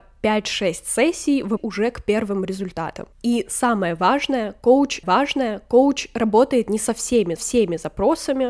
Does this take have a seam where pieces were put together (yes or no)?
yes